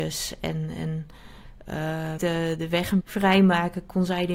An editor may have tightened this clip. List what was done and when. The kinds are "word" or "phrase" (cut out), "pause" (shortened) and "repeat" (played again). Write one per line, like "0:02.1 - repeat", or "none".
0:02.2 - phrase
0:03.0 - phrase